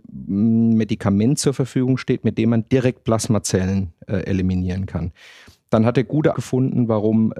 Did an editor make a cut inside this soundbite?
yes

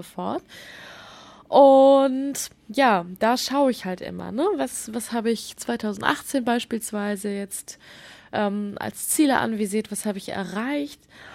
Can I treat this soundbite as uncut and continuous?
yes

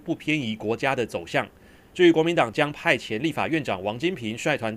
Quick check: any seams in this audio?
no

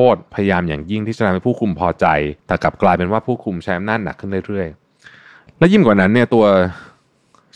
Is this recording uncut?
no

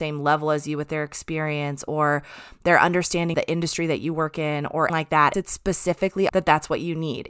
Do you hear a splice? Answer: yes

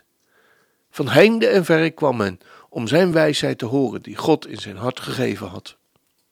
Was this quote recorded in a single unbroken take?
yes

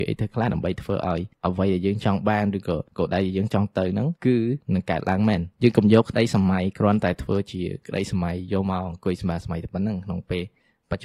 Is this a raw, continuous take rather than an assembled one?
no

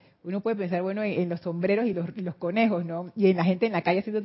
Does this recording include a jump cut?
no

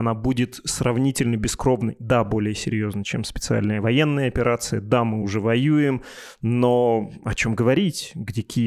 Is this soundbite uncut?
yes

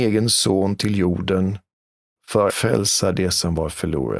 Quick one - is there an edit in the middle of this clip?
yes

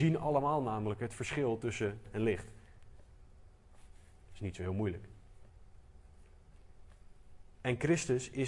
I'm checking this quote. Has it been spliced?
yes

